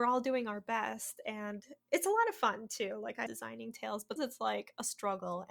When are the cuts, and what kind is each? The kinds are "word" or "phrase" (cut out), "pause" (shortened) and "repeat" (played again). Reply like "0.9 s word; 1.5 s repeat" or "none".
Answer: 3.3 s word; 4.2 s word